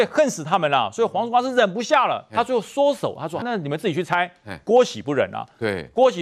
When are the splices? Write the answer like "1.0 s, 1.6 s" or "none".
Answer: 3.4 s